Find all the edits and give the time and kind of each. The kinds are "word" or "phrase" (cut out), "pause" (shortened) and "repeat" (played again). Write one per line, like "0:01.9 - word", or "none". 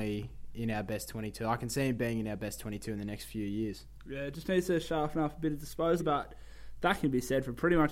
0:06.0 - word